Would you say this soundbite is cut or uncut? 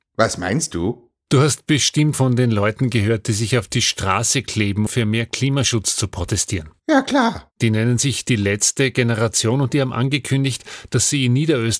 cut